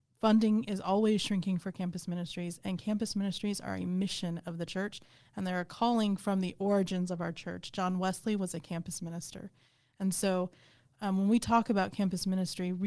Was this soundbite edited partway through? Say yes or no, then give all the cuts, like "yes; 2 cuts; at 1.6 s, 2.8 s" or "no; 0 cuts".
no; 0 cuts